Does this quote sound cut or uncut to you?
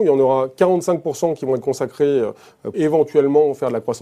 cut